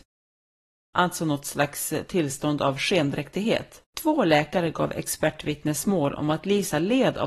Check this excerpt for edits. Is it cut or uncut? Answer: cut